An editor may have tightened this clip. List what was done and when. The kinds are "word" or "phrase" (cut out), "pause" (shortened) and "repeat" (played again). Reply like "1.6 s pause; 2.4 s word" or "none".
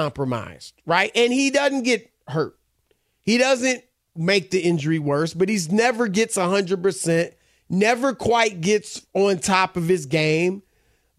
none